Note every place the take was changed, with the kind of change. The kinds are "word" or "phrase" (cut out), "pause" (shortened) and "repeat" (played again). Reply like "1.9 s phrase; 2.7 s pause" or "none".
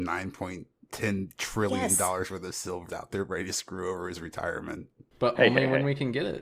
2.9 s word